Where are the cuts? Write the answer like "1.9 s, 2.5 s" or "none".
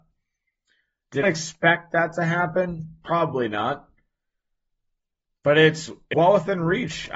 1.2 s, 6.1 s